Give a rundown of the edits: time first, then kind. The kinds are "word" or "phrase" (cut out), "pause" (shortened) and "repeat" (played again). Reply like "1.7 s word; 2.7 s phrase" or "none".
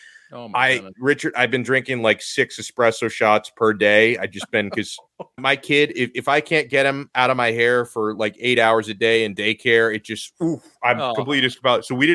5.4 s word